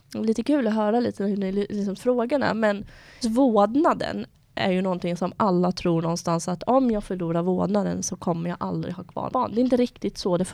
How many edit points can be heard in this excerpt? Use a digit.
3